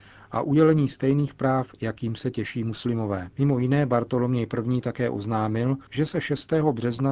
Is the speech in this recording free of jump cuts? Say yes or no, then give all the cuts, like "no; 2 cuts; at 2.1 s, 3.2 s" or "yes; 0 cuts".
no; 2 cuts; at 3.3 s, 5.9 s